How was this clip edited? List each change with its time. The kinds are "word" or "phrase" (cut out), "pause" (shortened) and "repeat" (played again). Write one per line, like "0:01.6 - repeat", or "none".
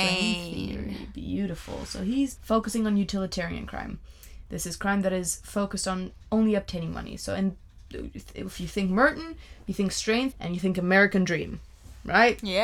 0:02.4 - word
0:10.3 - phrase